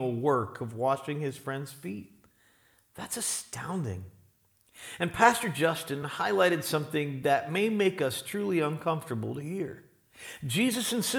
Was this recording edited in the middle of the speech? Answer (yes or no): no